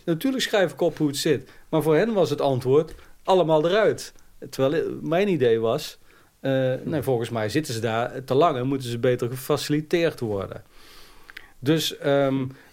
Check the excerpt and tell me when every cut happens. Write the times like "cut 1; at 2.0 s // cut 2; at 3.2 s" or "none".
none